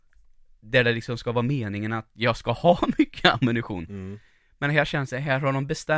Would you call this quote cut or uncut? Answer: uncut